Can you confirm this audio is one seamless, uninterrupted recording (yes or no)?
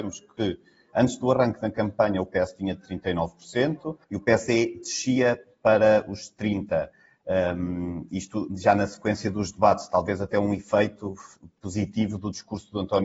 no